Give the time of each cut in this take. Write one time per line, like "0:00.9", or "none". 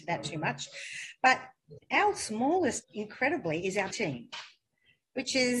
0:01.8
0:02.8
0:03.9

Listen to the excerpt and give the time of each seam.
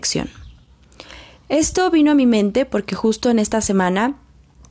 none

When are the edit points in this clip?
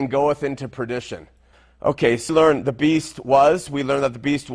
0:01.5
0:02.3

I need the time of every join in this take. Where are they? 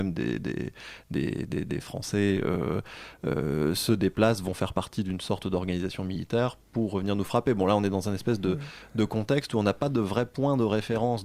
none

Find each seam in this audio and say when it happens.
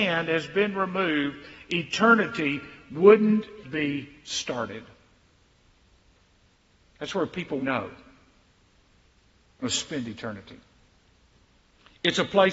0:03.6
0:07.6
0:09.6

